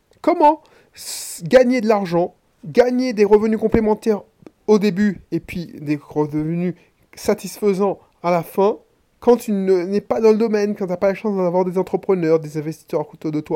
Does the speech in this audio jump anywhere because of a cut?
no; 0 cuts

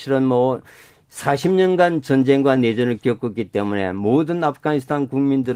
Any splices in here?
no; 0 cuts

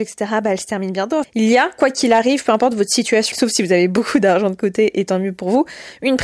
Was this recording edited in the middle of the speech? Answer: no; 0 cuts

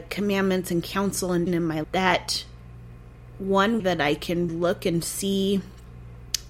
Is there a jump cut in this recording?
yes; 4 cuts; at 1.5 s, 1.8 s, 3.8 s, 4.5 s

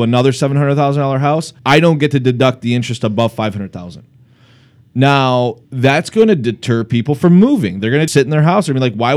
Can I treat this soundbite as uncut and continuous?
no; 3 cuts; at 1.6 s, 5.6 s, 8.1 s

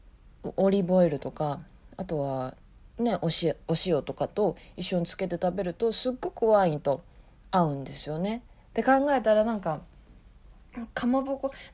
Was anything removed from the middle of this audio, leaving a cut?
no; 0 cuts

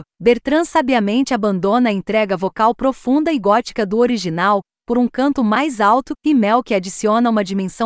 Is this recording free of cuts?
yes; 0 cuts

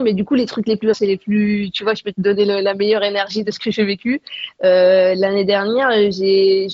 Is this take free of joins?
no; 1 cut; at 0.9 s

